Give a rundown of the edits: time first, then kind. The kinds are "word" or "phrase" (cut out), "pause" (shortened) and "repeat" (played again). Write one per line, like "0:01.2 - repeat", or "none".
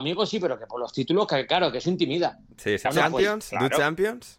0:02.8 - phrase